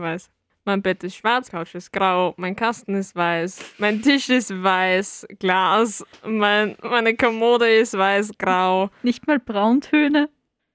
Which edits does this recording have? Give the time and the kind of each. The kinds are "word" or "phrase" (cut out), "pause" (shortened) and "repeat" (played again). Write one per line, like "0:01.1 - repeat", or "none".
0:01.5 - word
0:03.7 - pause